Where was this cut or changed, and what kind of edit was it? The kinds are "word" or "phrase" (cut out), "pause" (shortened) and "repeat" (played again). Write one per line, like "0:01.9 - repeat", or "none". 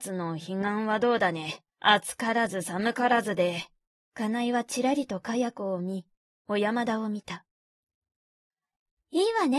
0:01.7 - pause
0:03.9 - pause